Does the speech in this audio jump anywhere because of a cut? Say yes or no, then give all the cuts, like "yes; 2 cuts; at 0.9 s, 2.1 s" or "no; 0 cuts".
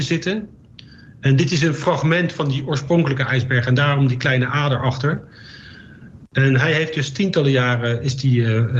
no; 0 cuts